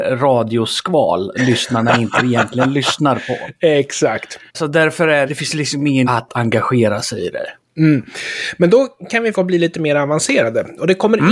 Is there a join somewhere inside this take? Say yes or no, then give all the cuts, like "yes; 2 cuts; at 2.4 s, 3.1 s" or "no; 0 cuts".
yes; 5 cuts; at 1.3 s, 4.5 s, 5.3 s, 6.0 s, 9.3 s